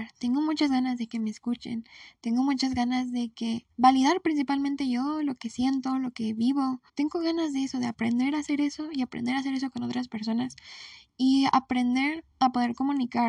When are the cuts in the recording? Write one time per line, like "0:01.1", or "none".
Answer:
0:03.7
0:06.9
0:12.3